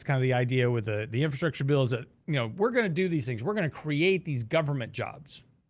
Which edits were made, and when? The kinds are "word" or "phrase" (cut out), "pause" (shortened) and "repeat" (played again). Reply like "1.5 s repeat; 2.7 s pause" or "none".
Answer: none